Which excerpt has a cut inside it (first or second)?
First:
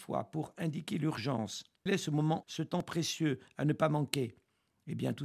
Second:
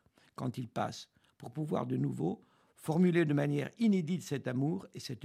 first